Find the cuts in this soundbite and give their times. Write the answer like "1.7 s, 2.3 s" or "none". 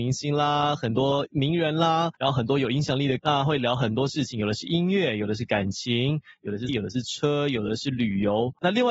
3.2 s, 6.7 s